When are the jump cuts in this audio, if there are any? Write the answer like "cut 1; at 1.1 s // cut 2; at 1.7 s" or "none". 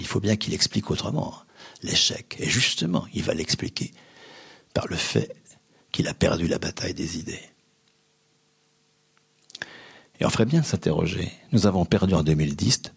none